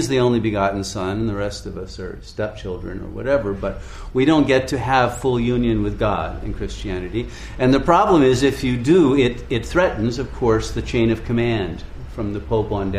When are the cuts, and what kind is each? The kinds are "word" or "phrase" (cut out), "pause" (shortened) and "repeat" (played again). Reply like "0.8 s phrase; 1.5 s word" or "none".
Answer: none